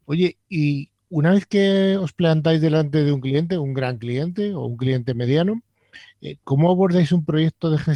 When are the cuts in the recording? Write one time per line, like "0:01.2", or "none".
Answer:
none